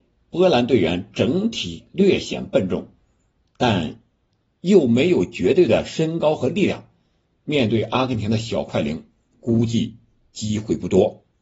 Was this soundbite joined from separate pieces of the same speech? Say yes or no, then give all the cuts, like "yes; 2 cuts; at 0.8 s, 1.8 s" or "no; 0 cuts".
no; 0 cuts